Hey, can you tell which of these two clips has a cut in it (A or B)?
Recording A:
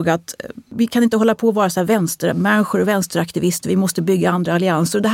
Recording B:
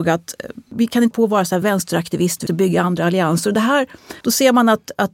B